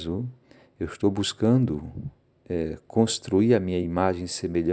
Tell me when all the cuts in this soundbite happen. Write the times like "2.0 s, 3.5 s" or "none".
none